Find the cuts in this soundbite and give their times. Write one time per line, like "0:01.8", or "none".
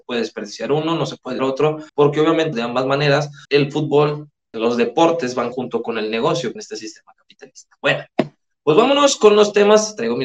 0:01.4
0:01.9
0:02.5
0:03.4
0:04.5
0:05.5
0:06.6